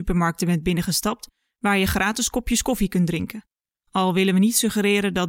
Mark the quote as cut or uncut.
uncut